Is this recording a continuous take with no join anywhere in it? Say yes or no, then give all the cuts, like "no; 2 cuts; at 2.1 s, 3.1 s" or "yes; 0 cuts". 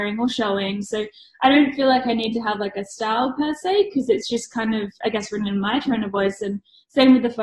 yes; 0 cuts